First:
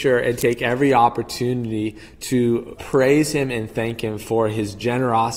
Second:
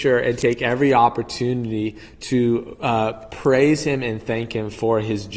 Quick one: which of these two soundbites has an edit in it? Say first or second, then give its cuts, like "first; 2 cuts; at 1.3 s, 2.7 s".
first; 1 cut; at 2.8 s